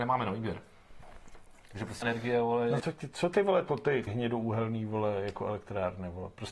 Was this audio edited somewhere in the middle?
yes; 4 cuts; at 2.0 s, 2.8 s, 3.7 s, 4.1 s

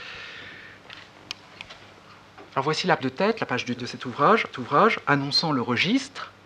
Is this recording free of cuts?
no; 4 cuts; at 2.5 s, 3.0 s, 3.8 s, 4.5 s

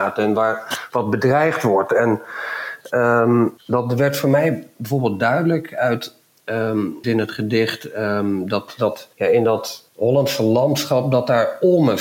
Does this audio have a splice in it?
yes; 4 cuts; at 3.6 s, 7.0 s, 9.1 s, 9.9 s

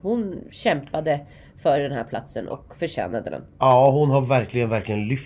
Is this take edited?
no; 0 cuts

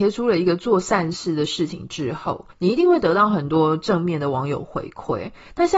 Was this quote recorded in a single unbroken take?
no; 1 cut; at 2.5 s

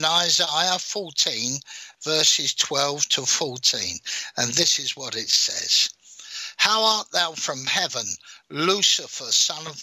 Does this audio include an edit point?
yes; 1 cut; at 7.3 s

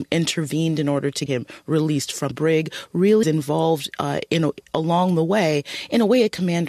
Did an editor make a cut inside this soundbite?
yes; 3 cuts; at 1.3 s, 2.3 s, 3.2 s

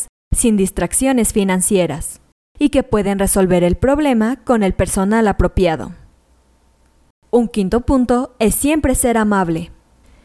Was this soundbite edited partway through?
no; 0 cuts

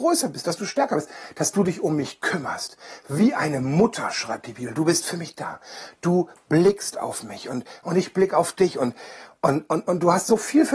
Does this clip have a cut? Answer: no; 0 cuts

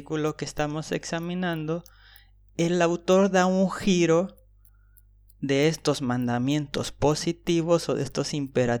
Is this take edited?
no; 0 cuts

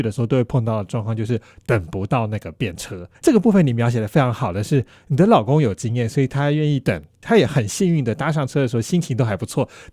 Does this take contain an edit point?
yes; 1 cut; at 3.1 s

